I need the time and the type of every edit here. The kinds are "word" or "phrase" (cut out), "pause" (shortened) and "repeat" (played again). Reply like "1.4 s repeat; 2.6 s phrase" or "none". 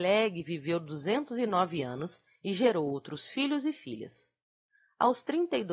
none